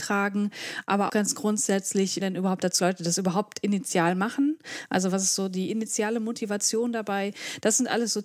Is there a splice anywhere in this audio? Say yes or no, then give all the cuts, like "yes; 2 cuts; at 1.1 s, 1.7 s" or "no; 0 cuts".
yes; 3 cuts; at 1.1 s, 2.2 s, 2.8 s